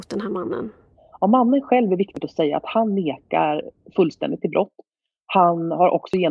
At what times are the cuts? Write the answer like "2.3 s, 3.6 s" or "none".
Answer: none